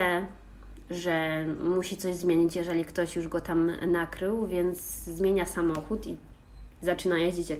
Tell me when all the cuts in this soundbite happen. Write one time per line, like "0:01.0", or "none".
none